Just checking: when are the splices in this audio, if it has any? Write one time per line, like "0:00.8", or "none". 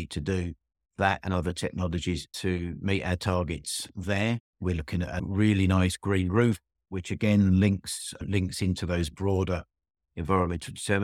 0:04.5